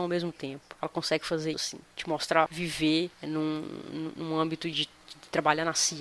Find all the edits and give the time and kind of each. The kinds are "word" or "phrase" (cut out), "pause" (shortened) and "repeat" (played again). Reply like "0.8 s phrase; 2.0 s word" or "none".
1.5 s word; 1.8 s pause; 2.5 s phrase; 3.1 s pause; 4.7 s word